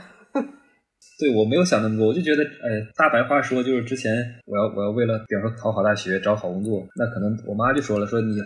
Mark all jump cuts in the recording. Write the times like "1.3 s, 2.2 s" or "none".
2.9 s, 4.4 s